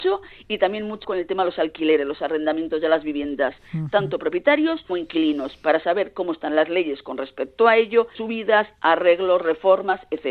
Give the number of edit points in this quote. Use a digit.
3